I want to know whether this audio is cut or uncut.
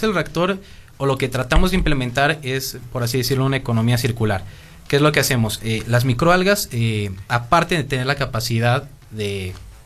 uncut